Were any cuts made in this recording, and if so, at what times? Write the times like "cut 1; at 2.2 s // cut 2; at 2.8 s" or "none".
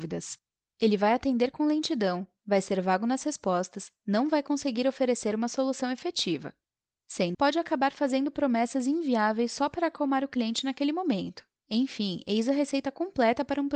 cut 1; at 7.3 s